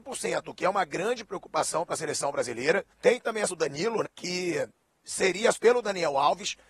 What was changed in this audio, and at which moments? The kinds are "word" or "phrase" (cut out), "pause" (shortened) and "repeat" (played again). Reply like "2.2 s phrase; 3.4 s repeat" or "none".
2.9 s pause; 3.5 s word; 4.0 s word; 5.5 s word